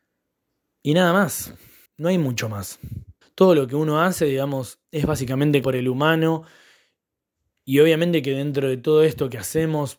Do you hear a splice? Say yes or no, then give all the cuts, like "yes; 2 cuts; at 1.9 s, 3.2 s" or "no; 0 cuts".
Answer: yes; 4 cuts; at 1.9 s, 3.2 s, 4.8 s, 5.6 s